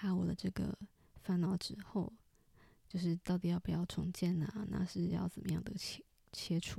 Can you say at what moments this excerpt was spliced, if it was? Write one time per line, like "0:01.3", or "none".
none